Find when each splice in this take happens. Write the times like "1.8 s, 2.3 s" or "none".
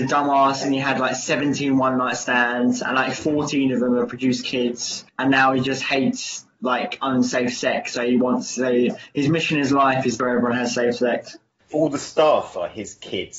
5.1 s, 10.2 s, 11.7 s